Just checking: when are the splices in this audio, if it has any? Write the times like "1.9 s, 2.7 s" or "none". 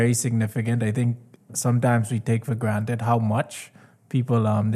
none